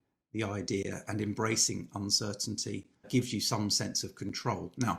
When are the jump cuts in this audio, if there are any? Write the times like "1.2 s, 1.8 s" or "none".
3.0 s